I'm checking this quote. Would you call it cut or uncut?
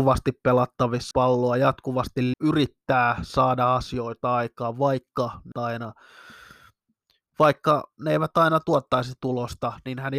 cut